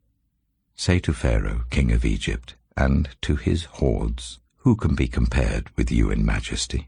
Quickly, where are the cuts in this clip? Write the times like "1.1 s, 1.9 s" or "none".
4.5 s